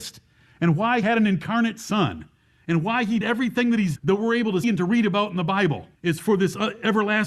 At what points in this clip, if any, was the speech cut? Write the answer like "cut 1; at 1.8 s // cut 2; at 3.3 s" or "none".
cut 1; at 1.0 s // cut 2; at 3.2 s // cut 3; at 4.0 s // cut 4; at 4.6 s // cut 5; at 6.0 s